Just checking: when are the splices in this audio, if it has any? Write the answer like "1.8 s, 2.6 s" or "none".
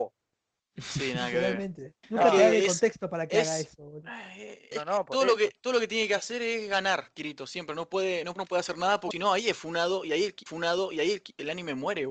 2.0 s, 4.7 s, 8.4 s, 9.1 s, 10.5 s